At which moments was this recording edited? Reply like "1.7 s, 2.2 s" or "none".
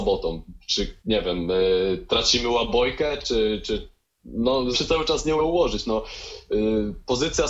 1.0 s, 4.7 s, 5.4 s